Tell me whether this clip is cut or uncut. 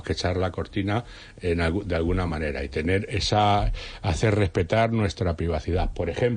uncut